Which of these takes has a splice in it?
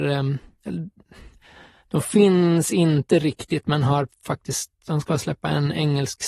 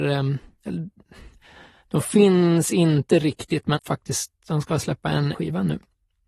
second; 2 cuts; at 3.8 s, 5.3 s

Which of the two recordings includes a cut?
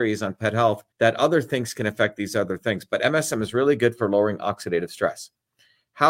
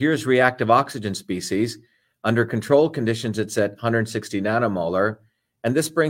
first; 1 cut; at 0.9 s

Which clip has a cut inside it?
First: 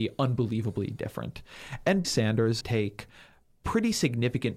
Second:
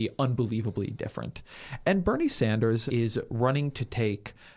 first; 2 cuts; at 2.0 s, 2.6 s

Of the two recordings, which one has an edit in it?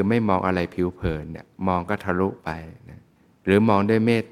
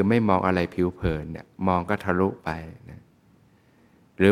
first; 1 cut; at 3.2 s

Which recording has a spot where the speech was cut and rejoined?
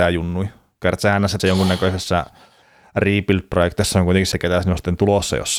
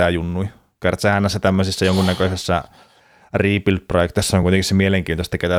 first; 2 cuts; at 1.4 s, 4.3 s

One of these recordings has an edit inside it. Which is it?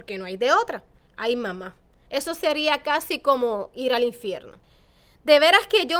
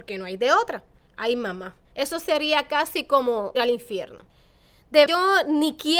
second; 3 cuts; at 1.8 s, 3.5 s, 5.1 s

